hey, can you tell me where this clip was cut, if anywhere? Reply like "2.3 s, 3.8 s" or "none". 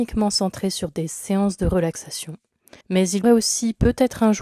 2.8 s, 3.2 s